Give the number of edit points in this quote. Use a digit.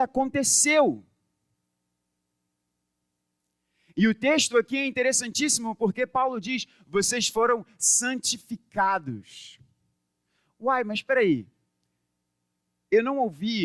0